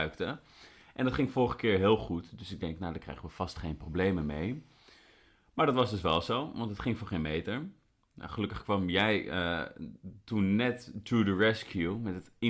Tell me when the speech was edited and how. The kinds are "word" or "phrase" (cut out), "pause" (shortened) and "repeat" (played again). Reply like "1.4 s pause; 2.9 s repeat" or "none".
none